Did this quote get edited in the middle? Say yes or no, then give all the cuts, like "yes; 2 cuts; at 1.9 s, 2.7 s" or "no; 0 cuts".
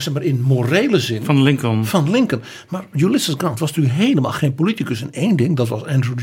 no; 0 cuts